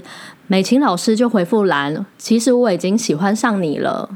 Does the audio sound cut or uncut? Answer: cut